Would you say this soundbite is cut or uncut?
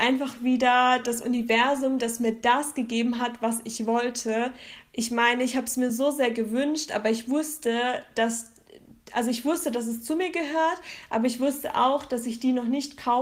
uncut